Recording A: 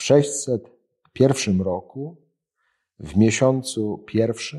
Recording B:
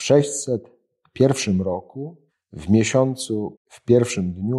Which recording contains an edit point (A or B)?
B